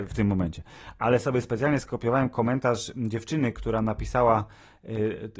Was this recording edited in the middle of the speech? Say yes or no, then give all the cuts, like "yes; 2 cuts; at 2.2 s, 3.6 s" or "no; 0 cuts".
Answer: no; 0 cuts